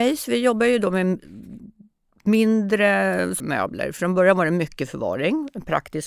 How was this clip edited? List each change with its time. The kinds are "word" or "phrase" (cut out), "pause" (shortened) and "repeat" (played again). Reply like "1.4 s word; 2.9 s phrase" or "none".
3.4 s phrase